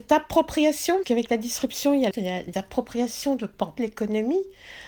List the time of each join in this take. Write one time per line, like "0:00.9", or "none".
0:01.0
0:02.1
0:02.5
0:03.8

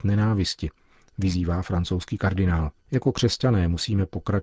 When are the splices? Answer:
0:02.8

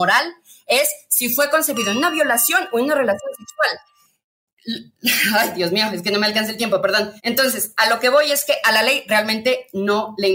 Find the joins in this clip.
0:07.2

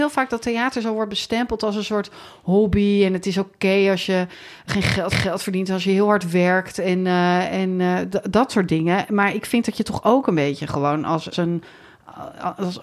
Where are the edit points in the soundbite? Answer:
0:04.7
0:05.1
0:11.3

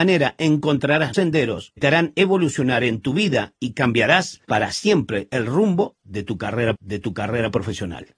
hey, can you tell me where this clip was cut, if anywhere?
0:01.1
0:01.8
0:03.6
0:04.4
0:06.8

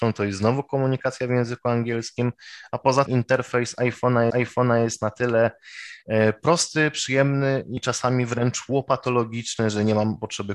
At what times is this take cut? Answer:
0:03.1
0:04.3
0:07.8

